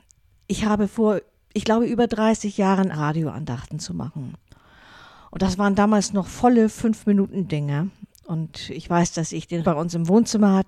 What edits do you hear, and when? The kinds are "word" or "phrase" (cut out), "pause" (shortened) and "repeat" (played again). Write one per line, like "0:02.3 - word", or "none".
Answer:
0:02.9 - word
0:09.6 - word

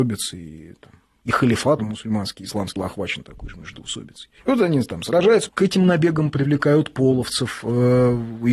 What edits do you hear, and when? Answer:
0:01.8 - word
0:02.8 - word
0:04.4 - pause
0:05.5 - word

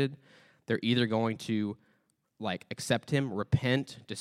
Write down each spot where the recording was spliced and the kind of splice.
none

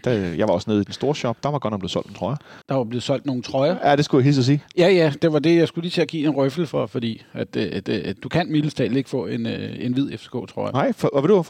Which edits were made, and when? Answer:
0:02.6 - pause
0:07.8 - repeat

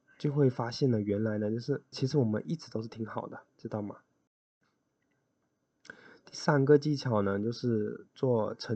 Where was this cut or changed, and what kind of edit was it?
0:01.9 - word

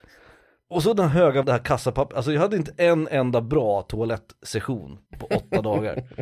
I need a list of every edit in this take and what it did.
0:01.4 - word
0:05.1 - pause

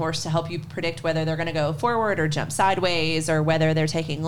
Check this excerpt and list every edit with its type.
none

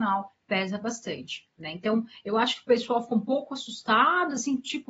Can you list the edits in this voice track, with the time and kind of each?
none

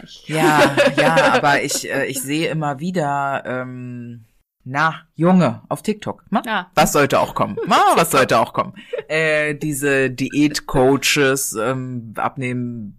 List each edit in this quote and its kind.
0:05.1 - pause

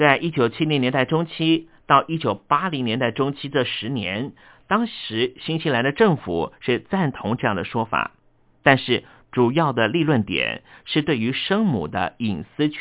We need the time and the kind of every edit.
none

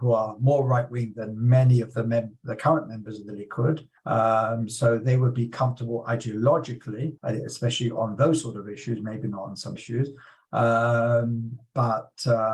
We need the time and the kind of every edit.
0:04.0 - pause
0:07.2 - pause
0:09.8 - phrase

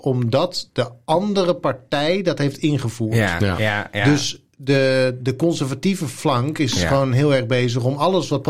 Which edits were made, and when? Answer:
none

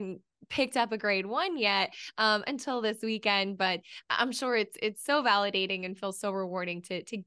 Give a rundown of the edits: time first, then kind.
none

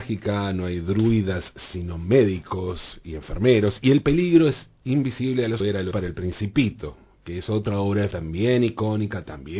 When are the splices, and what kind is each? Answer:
0:05.6 - phrase
0:05.9 - word
0:08.1 - word

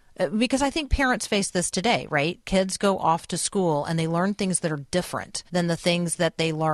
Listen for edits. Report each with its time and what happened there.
0:05.5 - pause

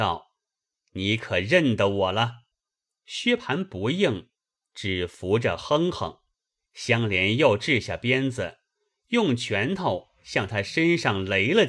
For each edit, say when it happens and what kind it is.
0:02.5 - pause
0:06.3 - pause

